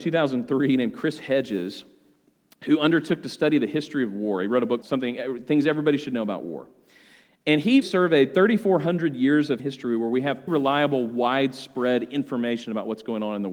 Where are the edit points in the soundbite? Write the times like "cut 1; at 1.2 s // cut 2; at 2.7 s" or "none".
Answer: cut 1; at 4.8 s // cut 2; at 7.8 s // cut 3; at 9.6 s // cut 4; at 10.5 s